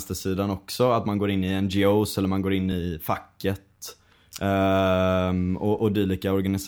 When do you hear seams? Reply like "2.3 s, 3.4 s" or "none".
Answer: none